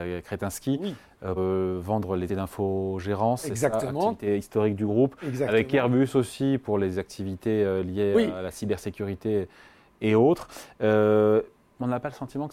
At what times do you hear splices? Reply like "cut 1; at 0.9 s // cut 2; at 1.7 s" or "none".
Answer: cut 1; at 1.4 s // cut 2; at 2.3 s